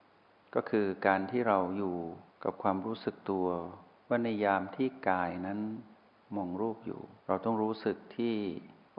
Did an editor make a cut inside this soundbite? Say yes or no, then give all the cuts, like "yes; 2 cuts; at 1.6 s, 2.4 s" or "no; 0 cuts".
yes; 2 cuts; at 4.0 s, 7.2 s